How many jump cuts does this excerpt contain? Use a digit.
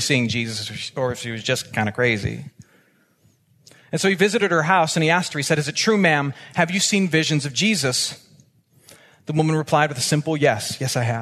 0